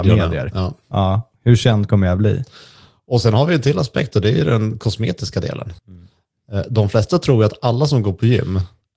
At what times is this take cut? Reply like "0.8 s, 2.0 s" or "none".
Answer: 5.8 s